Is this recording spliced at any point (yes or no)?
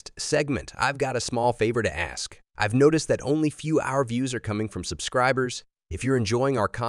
no